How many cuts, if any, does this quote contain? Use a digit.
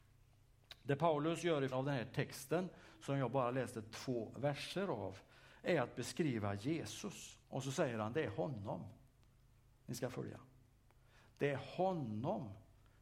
2